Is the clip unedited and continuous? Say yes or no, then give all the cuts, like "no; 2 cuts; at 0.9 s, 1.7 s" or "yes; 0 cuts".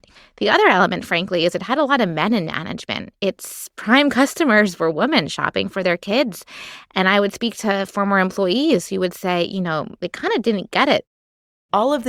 yes; 0 cuts